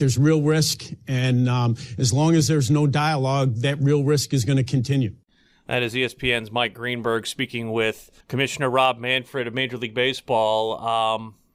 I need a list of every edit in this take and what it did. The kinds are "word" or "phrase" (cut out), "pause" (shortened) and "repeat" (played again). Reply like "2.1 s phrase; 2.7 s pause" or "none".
8.2 s pause